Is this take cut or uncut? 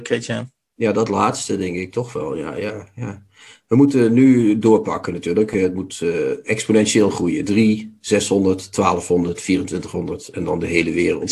uncut